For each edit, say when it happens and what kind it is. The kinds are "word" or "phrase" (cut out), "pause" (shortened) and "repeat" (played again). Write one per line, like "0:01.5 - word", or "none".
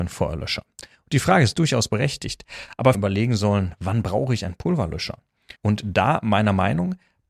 0:02.9 - phrase
0:05.6 - pause